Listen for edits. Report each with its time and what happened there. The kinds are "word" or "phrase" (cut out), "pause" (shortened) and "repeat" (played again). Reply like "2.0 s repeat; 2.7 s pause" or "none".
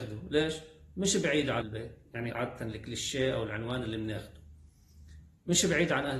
1.6 s word; 2.3 s word